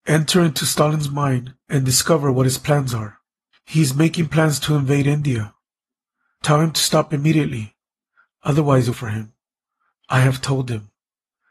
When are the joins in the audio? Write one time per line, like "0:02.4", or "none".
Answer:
0:01.6
0:03.5
0:08.9